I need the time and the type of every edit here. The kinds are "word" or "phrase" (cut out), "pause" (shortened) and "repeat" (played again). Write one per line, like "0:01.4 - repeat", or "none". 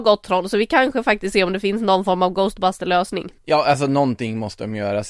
0:01.3 - word
0:03.4 - pause